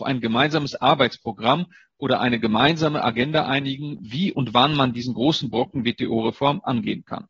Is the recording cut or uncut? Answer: uncut